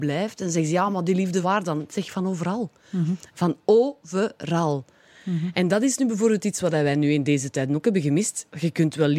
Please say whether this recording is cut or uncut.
cut